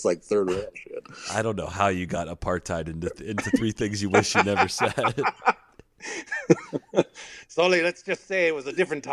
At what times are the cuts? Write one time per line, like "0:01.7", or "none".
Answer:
none